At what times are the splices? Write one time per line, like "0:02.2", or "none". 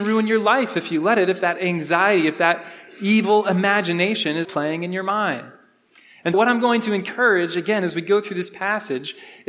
0:04.4
0:06.3